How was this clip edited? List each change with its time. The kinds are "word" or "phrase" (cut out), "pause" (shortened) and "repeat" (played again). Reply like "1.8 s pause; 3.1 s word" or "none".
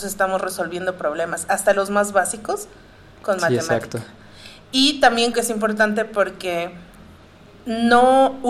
5.3 s word